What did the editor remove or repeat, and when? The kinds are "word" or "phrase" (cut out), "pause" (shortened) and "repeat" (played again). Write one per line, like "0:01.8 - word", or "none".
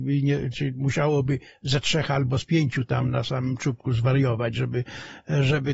none